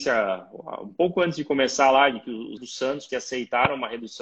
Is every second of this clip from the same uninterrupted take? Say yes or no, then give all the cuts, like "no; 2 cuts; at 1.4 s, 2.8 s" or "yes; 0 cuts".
no; 2 cuts; at 2.6 s, 3.1 s